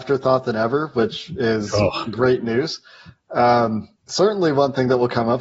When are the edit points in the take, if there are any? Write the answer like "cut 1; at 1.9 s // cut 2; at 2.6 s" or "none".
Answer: cut 1; at 4.0 s